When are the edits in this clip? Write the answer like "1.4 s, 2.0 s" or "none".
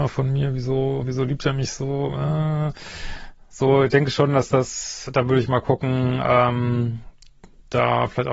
none